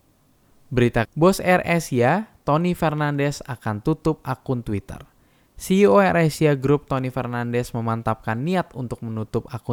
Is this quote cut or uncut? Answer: cut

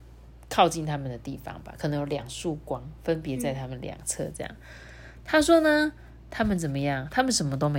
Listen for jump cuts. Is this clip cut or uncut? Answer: uncut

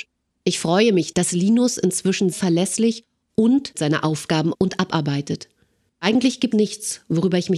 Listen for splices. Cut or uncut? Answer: cut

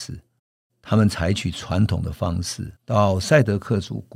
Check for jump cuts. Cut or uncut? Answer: cut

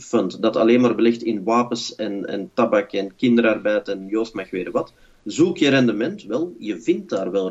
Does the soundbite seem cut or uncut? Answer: uncut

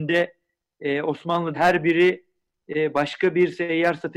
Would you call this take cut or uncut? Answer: cut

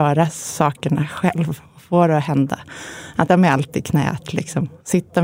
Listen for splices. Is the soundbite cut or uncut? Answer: cut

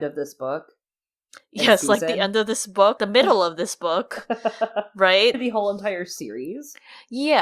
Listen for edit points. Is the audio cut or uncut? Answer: cut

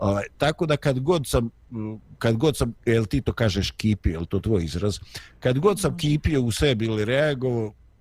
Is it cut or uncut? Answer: cut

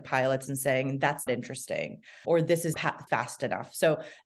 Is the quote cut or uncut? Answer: cut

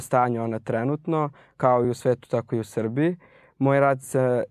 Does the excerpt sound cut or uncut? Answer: uncut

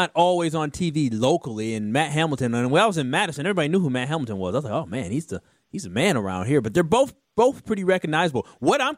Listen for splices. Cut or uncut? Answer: uncut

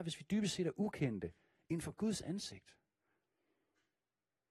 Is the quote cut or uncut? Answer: uncut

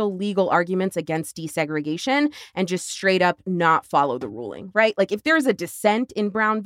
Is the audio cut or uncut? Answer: uncut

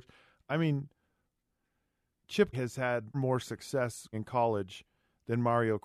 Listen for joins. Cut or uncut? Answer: cut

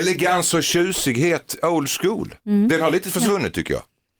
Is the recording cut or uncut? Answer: cut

